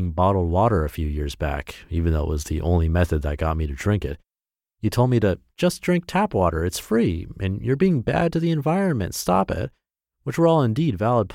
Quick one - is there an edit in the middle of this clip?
no; 0 cuts

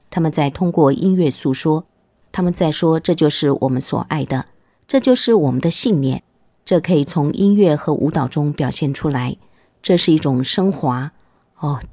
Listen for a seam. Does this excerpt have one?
no; 0 cuts

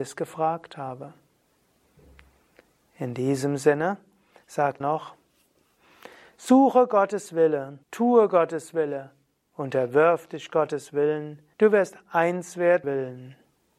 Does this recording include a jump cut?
yes; 4 cuts; at 4.8 s, 7.8 s, 11.5 s, 12.8 s

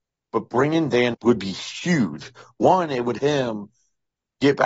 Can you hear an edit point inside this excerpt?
yes; 2 cuts; at 1.1 s, 3.2 s

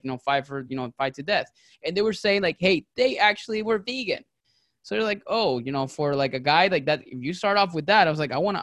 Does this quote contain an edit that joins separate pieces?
no; 0 cuts

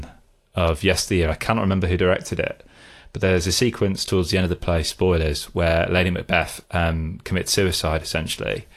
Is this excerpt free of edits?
no; 1 cut; at 6.6 s

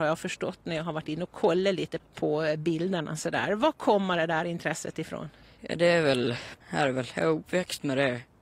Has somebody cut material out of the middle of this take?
yes; 2 cuts; at 2.0 s, 6.6 s

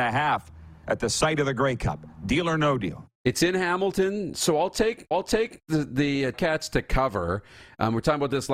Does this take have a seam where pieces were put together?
yes; 3 cuts; at 3.1 s, 5.1 s, 6.3 s

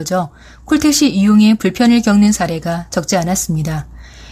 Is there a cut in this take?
no; 0 cuts

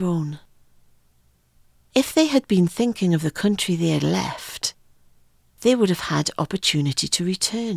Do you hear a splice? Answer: no; 0 cuts

